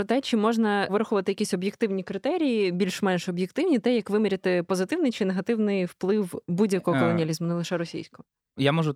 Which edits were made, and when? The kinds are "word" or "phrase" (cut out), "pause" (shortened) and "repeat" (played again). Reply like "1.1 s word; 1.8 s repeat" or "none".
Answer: none